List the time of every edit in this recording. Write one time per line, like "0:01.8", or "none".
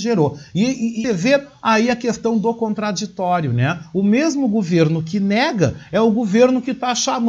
0:01.0